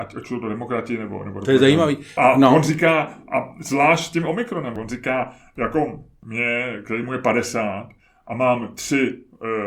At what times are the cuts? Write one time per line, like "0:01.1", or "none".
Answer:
none

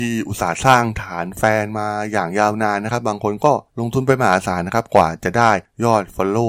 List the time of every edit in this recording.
0:03.7

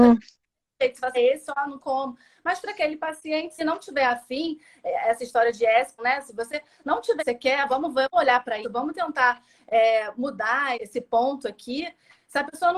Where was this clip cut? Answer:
0:01.1
0:01.8
0:03.6
0:06.0
0:07.2
0:07.7
0:08.1
0:08.6
0:10.7

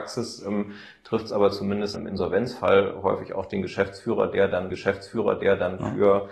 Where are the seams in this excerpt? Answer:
0:01.9
0:04.7

